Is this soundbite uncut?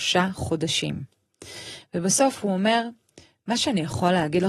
yes; 0 cuts

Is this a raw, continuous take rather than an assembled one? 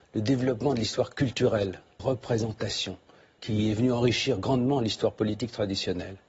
no; 2 cuts; at 2.0 s, 3.4 s

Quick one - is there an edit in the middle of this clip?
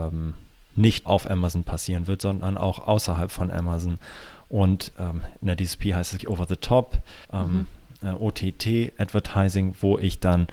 yes; 4 cuts; at 1.1 s, 4.9 s, 6.2 s, 7.2 s

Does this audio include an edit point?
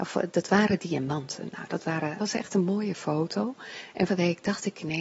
yes; 2 cuts; at 2.2 s, 4.1 s

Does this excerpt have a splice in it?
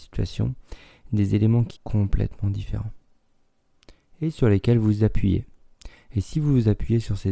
yes; 1 cut; at 1.8 s

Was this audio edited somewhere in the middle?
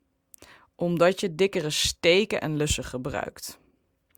no; 0 cuts

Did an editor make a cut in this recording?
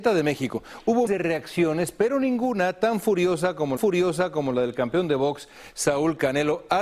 yes; 2 cuts; at 1.1 s, 3.8 s

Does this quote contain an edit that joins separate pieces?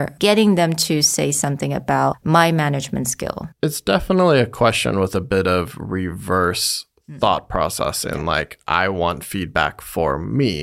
yes; 1 cut; at 3.5 s

